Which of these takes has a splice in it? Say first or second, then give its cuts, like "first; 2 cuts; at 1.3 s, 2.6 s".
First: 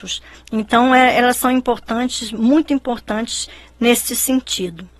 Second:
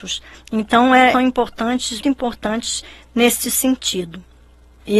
second; 2 cuts; at 1.1 s, 2.0 s